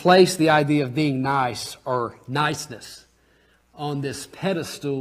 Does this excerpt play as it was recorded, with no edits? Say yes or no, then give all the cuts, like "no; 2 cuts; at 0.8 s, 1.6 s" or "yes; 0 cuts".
yes; 0 cuts